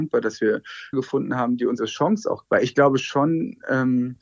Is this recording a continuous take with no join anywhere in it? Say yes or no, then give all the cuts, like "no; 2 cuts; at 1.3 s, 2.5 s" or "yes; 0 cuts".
no; 3 cuts; at 0.9 s, 1.8 s, 2.4 s